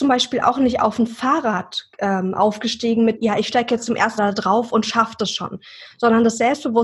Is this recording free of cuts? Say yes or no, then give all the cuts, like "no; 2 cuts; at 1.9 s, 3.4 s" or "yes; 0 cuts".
no; 3 cuts; at 1.9 s, 3.2 s, 4.2 s